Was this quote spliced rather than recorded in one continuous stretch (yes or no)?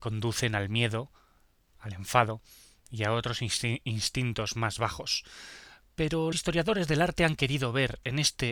yes